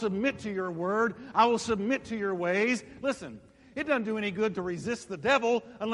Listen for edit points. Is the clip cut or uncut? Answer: uncut